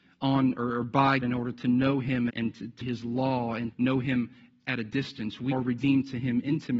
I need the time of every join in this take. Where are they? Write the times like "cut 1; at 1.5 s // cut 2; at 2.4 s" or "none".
cut 1; at 1.2 s // cut 2; at 2.3 s // cut 3; at 2.8 s // cut 4; at 3.7 s // cut 5; at 5.5 s